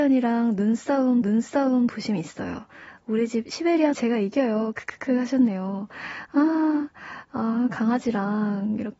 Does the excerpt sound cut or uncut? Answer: cut